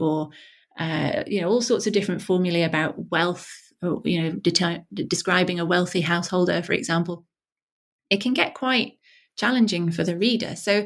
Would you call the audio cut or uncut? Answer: uncut